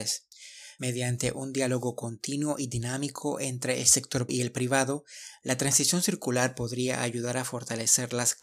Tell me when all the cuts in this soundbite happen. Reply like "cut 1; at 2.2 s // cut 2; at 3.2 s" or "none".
cut 1; at 4.3 s